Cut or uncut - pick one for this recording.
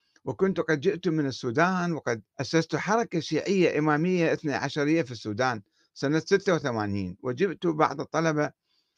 cut